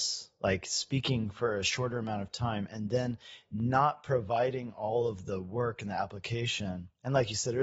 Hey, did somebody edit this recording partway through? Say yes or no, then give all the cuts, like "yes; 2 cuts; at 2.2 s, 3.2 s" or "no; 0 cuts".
no; 0 cuts